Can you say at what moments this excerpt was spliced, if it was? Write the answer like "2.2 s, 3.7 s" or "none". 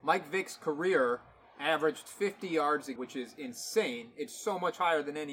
3.0 s